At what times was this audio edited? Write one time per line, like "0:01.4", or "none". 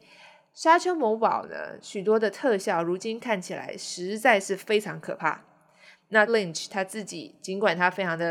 0:06.3